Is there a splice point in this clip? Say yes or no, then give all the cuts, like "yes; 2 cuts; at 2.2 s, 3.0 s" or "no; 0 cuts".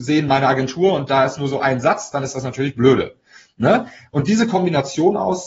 no; 0 cuts